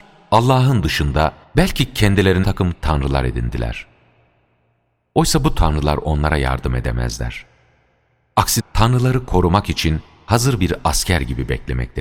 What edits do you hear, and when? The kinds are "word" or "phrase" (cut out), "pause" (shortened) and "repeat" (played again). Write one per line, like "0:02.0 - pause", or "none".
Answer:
0:01.4 - pause
0:02.4 - phrase
0:08.6 - word